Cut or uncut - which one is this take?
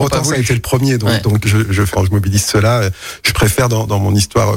cut